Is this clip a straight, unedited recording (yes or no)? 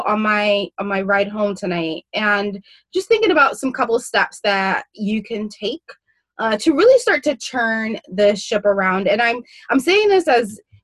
yes